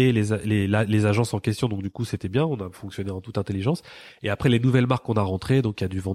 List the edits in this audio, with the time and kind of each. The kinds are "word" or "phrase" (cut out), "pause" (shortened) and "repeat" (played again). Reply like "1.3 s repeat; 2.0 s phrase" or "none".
none